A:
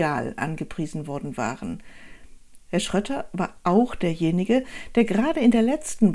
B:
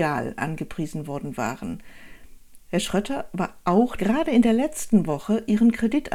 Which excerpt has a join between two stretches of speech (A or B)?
B